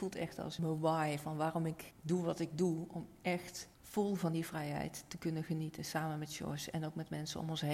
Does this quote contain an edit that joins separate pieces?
no; 0 cuts

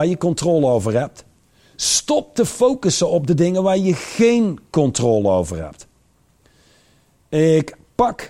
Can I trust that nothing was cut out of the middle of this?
yes; 0 cuts

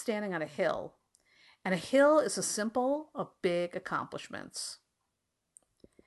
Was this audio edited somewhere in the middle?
no; 0 cuts

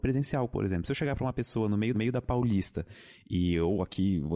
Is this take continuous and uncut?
no; 1 cut; at 1.9 s

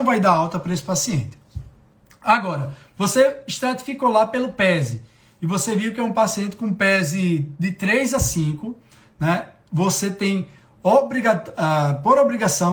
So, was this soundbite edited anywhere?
no; 0 cuts

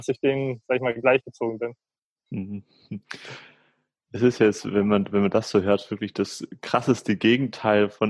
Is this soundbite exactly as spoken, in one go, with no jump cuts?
yes; 0 cuts

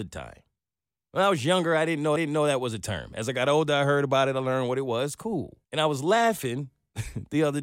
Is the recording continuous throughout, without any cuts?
no; 2 cuts; at 2.2 s, 5.6 s

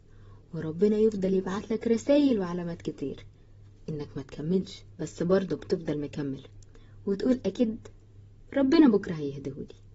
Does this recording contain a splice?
yes; 1 cut; at 4.9 s

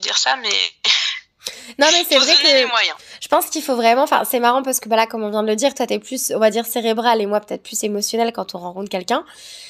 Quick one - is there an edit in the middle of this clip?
no; 0 cuts

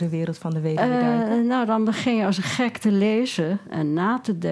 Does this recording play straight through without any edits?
yes; 0 cuts

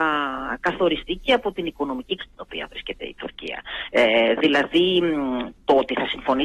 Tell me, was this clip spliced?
yes; 1 cut; at 2.2 s

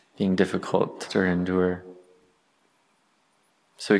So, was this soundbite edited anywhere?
yes; 1 cut; at 1.1 s

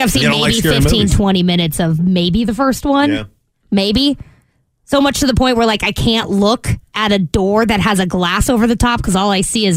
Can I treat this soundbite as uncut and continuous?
no; 1 cut; at 3.5 s

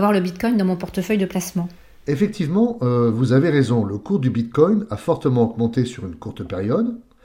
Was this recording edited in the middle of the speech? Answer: no; 0 cuts

